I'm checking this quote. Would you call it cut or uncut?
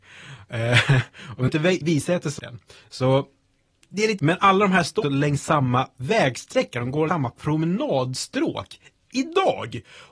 cut